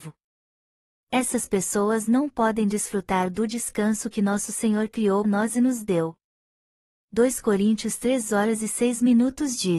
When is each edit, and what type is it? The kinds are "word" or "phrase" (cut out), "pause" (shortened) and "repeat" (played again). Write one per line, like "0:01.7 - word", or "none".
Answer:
0:05.2 - word